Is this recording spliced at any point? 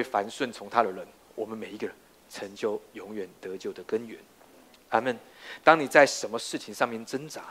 no; 0 cuts

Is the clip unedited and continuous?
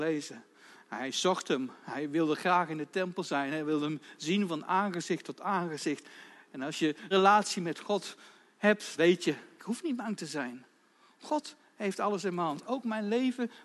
no; 3 cuts; at 7.1 s, 9.0 s, 9.6 s

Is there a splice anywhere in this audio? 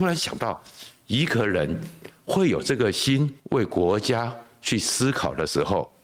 yes; 1 cut; at 3.4 s

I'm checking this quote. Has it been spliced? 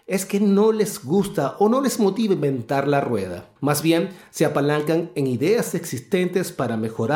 yes; 1 cut; at 3.6 s

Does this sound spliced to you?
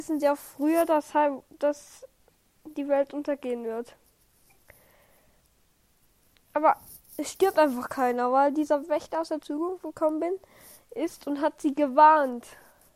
no; 0 cuts

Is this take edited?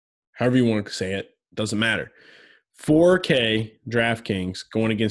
no; 0 cuts

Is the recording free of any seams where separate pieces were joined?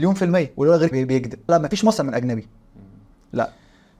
no; 3 cuts; at 0.9 s, 1.5 s, 2.0 s

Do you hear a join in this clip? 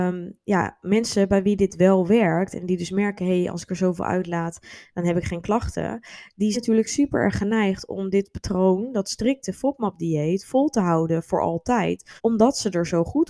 yes; 2 cuts; at 6.5 s, 12.2 s

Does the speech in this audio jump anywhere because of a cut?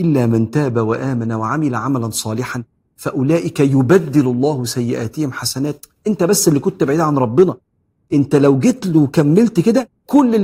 no; 0 cuts

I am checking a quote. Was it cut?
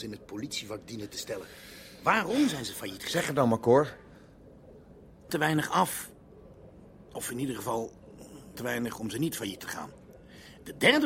yes; 3 cuts; at 5.3 s, 8.5 s, 9.6 s

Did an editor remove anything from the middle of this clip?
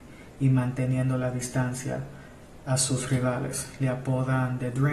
no; 0 cuts

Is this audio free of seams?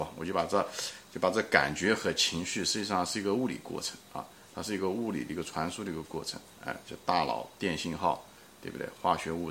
no; 1 cut; at 6.5 s

